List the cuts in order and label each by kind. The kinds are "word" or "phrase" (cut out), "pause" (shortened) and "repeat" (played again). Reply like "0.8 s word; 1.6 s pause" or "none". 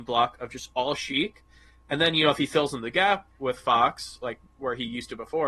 none